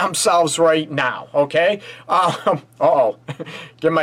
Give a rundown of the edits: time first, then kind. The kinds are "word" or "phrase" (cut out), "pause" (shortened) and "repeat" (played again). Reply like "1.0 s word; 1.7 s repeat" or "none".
2.7 s pause